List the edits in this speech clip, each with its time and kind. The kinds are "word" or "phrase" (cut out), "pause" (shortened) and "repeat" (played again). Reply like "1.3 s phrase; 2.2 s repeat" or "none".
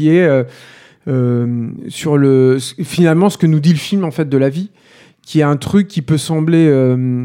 none